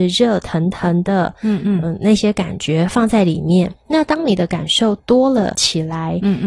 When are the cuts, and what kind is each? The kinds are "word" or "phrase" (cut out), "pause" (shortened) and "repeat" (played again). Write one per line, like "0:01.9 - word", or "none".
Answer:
0:03.8 - pause